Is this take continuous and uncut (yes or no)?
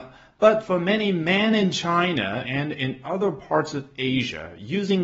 yes